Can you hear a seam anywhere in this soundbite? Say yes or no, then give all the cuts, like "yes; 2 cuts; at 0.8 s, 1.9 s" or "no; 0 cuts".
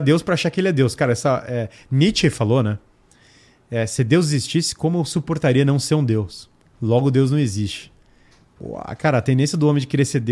no; 0 cuts